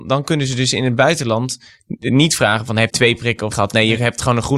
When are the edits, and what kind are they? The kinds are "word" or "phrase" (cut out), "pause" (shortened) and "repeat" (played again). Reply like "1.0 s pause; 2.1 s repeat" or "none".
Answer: 2.9 s word; 3.5 s word